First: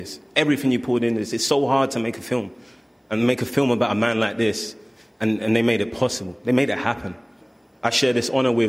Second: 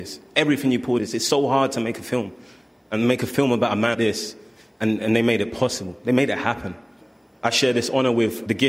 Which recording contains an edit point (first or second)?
second